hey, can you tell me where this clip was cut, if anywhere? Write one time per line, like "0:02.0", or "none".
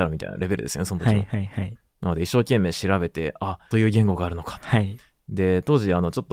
0:03.7